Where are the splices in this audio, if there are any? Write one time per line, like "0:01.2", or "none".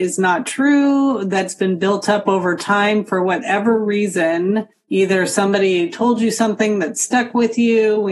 0:04.7